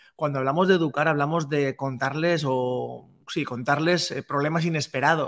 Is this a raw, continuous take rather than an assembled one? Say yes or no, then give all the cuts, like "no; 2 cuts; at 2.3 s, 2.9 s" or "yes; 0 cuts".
no; 1 cut; at 3.2 s